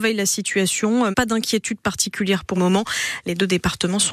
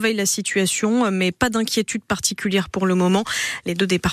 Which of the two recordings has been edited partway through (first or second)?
first